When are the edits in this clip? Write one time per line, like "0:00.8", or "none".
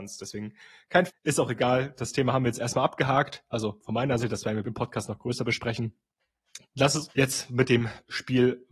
0:01.1
0:04.2
0:04.6
0:07.1